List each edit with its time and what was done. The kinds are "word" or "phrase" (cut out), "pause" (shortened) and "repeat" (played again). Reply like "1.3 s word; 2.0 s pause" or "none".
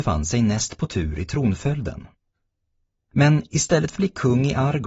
4.0 s word